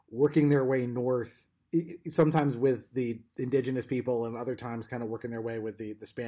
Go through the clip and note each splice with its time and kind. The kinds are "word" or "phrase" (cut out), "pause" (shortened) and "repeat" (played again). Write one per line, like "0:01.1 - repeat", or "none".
0:03.3 - pause